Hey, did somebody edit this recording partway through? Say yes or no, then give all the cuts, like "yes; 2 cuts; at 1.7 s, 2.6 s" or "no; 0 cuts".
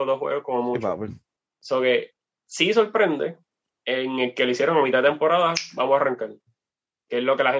yes; 3 cuts; at 1.3 s, 2.2 s, 3.6 s